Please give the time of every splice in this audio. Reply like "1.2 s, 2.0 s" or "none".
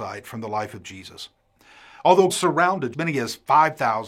2.3 s, 2.9 s